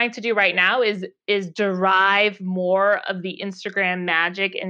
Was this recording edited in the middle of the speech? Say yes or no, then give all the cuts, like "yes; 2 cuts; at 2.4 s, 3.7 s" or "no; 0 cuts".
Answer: no; 0 cuts